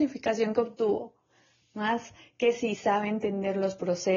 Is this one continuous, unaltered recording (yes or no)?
yes